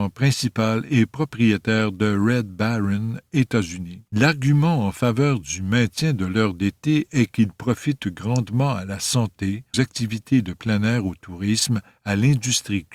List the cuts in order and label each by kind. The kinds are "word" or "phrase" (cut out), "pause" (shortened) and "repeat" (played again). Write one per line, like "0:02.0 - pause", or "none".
0:04.1 - pause
0:09.7 - word